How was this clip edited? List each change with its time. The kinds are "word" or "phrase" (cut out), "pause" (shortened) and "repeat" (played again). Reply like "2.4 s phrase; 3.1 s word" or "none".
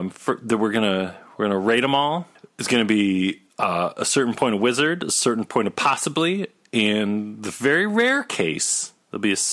3.5 s pause